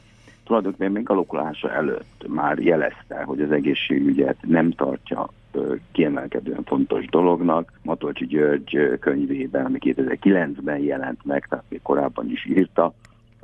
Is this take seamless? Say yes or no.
no